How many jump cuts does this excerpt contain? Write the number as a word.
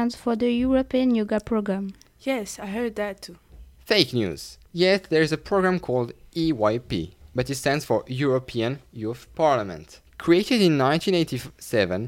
two